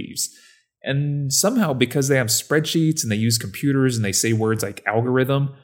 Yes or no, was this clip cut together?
no